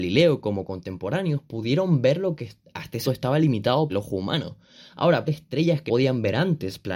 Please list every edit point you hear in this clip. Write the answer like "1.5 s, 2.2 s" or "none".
3.0 s, 3.9 s, 5.3 s, 5.9 s